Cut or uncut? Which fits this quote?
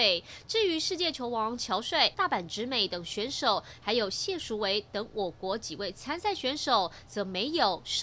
cut